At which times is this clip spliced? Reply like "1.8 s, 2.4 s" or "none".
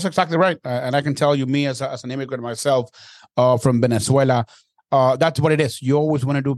none